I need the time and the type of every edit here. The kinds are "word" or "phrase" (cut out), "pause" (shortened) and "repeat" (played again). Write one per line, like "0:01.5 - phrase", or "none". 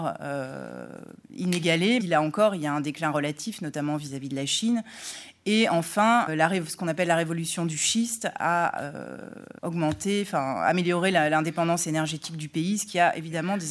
0:02.0 - phrase
0:06.3 - word
0:09.6 - pause

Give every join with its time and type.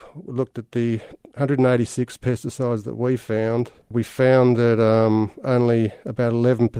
0:03.8 - pause

